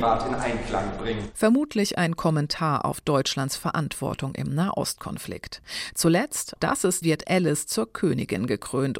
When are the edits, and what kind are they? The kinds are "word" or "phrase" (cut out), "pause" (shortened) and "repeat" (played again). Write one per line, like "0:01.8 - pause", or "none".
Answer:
0:06.6 - word
0:07.0 - word